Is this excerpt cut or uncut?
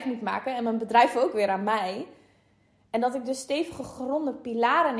uncut